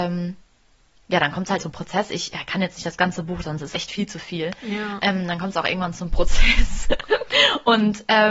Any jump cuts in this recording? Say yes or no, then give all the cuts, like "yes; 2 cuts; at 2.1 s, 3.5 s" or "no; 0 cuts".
yes; 3 cuts; at 1.6 s, 2.3 s, 3.7 s